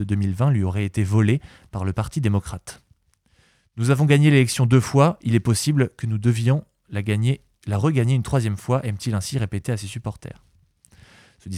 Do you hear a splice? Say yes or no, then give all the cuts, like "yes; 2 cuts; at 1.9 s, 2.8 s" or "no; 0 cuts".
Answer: no; 0 cuts